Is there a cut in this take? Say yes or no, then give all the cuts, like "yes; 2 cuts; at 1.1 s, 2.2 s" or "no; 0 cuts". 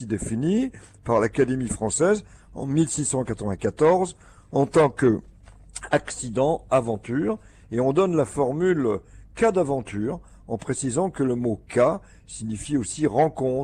no; 0 cuts